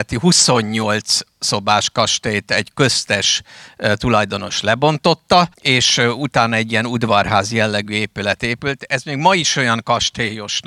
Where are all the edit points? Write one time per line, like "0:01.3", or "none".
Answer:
0:05.5

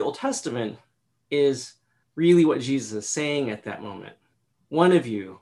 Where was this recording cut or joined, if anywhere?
0:02.0

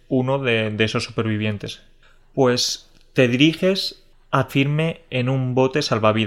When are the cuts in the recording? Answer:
0:04.5

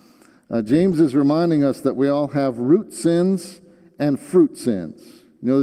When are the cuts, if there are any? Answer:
none

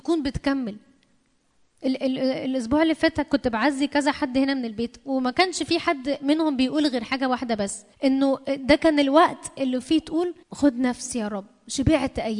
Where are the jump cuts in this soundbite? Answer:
0:07.9
0:10.4

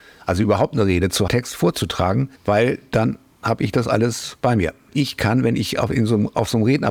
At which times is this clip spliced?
0:01.3
0:02.4
0:04.9

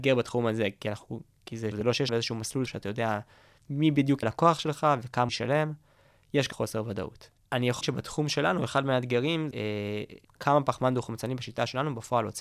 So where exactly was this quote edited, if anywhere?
0:01.7
0:02.1
0:02.7
0:04.2
0:05.3
0:06.5
0:07.8
0:09.5
0:10.2

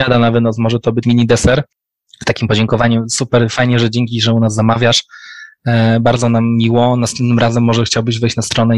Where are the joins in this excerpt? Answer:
0:01.0

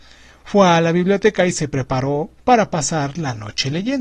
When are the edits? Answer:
0:02.4

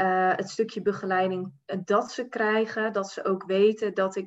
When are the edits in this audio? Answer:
none

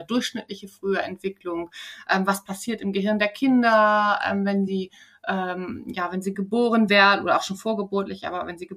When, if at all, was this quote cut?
none

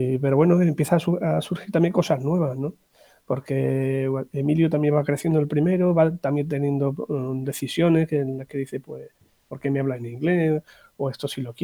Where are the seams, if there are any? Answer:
none

